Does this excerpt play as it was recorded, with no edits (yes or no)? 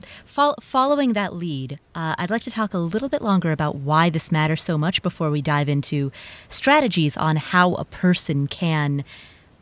yes